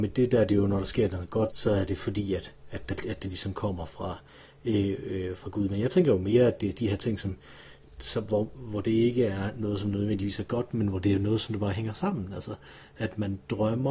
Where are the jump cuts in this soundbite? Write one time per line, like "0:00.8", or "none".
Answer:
0:01.5